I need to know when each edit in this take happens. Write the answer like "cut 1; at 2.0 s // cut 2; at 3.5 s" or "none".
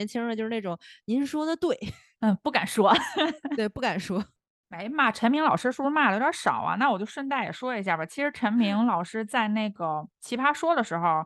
none